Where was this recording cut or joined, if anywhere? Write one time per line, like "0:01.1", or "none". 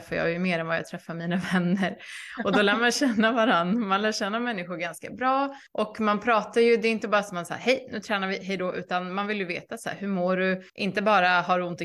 0:05.7
0:10.7